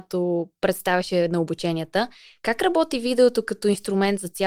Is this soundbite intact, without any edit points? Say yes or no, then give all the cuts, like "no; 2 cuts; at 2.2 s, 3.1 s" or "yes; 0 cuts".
yes; 0 cuts